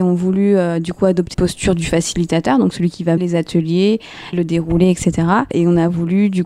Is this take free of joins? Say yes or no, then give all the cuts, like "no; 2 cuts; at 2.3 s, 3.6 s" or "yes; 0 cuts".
no; 3 cuts; at 1.3 s, 3.2 s, 4.3 s